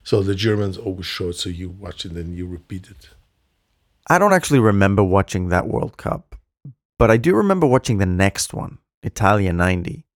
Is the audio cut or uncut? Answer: uncut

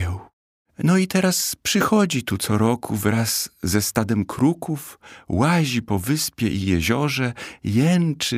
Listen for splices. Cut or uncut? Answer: uncut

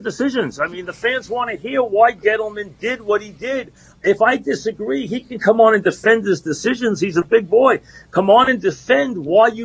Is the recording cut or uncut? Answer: uncut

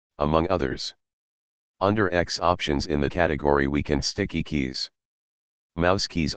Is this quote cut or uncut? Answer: cut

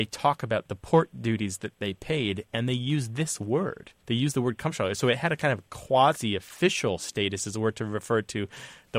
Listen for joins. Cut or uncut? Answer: cut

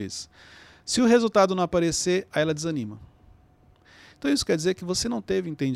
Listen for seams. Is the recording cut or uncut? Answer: uncut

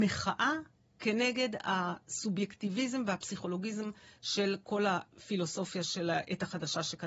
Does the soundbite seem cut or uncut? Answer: uncut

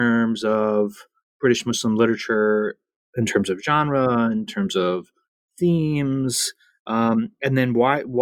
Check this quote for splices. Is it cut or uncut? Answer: cut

